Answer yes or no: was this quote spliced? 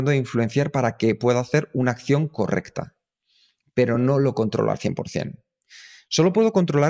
no